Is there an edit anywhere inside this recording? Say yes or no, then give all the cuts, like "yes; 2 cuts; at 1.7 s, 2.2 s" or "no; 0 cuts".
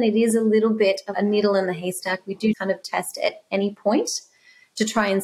yes; 2 cuts; at 1.1 s, 2.5 s